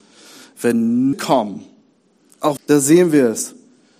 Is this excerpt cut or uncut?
cut